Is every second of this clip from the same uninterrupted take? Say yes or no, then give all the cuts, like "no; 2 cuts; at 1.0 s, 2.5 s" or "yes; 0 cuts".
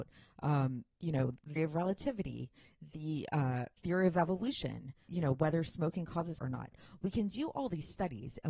no; 4 cuts; at 1.6 s, 3.8 s, 5.1 s, 6.4 s